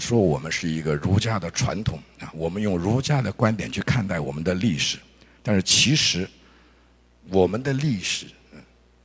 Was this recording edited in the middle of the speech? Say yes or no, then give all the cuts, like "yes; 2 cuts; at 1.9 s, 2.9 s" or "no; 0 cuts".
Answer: no; 0 cuts